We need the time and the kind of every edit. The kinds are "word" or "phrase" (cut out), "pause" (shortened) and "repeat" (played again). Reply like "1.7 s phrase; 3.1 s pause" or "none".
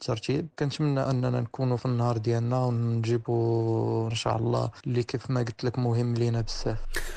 1.1 s word; 1.8 s word; 4.1 s word